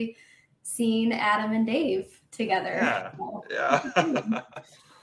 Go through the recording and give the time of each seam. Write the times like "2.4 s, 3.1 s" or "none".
none